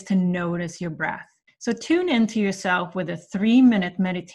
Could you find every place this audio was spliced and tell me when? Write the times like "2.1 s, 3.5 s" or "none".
1.5 s

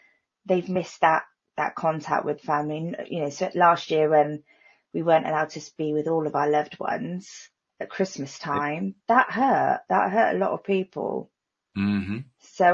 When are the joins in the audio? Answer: none

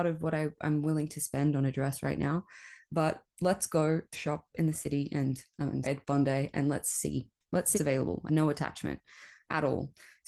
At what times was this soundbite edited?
4.1 s, 5.8 s, 7.7 s, 8.3 s

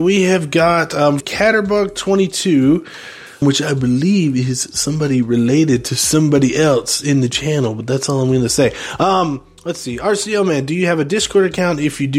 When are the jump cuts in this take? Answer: 1.2 s, 3.4 s

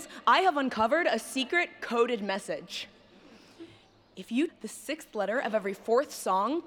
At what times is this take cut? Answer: 4.5 s

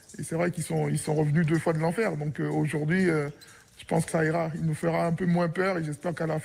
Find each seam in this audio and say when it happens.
4.1 s

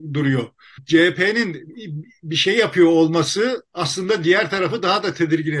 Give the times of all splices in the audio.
3.7 s

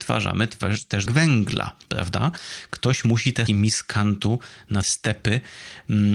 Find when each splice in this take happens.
1.1 s, 1.8 s, 3.5 s, 4.8 s

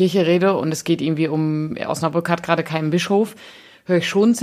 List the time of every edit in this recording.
none

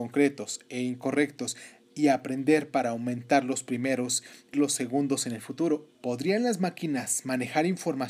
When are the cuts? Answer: 1.8 s, 4.5 s, 5.9 s

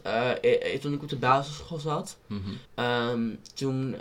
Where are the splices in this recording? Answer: 2.7 s

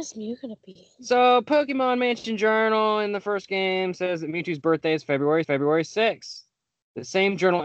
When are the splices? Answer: 5.4 s

